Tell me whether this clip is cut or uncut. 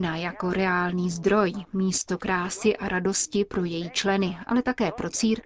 uncut